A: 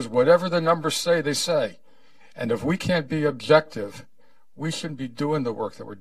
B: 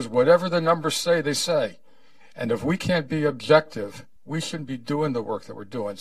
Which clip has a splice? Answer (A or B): B